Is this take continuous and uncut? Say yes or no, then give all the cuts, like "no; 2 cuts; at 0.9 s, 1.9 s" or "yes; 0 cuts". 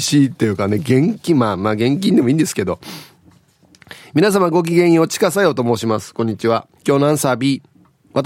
no; 1 cut; at 6.8 s